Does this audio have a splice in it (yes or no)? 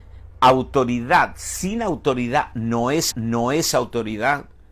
yes